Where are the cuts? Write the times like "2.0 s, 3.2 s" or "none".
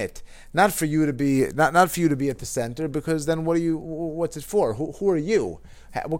none